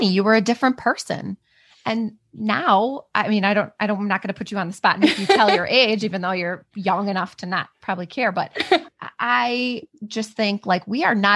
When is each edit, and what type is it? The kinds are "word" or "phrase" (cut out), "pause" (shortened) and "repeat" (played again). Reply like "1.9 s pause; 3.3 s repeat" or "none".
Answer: none